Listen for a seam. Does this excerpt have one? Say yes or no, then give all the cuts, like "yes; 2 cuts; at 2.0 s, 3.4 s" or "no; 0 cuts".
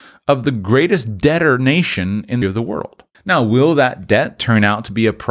yes; 2 cuts; at 2.4 s, 3.1 s